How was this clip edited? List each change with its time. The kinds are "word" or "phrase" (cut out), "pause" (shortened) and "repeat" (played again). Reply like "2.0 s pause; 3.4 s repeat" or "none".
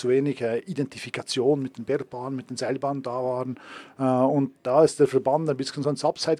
none